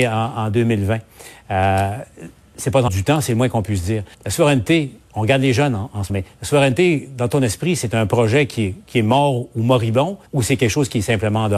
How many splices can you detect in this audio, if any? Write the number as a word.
four